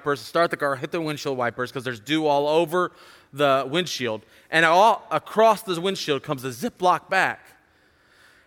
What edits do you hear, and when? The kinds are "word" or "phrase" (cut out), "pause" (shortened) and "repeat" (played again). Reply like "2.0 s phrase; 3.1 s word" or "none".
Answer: none